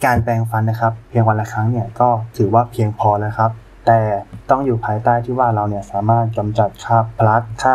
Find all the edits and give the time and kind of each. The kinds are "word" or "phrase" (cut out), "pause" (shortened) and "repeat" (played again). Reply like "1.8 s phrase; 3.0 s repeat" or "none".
none